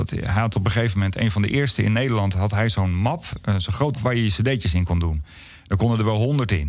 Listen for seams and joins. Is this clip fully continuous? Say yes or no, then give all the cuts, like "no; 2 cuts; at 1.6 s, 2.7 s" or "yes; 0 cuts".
no; 1 cut; at 3.9 s